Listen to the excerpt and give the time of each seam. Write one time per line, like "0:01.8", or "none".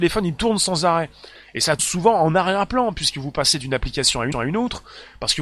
0:01.8
0:04.3